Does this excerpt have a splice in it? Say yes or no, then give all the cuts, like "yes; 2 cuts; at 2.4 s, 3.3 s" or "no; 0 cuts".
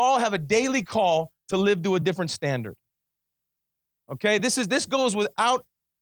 no; 0 cuts